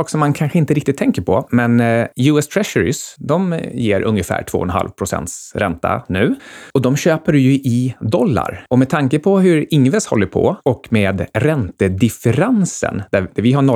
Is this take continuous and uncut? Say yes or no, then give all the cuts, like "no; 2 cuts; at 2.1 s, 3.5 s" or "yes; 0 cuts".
yes; 0 cuts